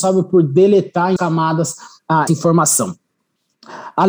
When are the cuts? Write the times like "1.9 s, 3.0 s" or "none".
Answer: 1.2 s, 2.3 s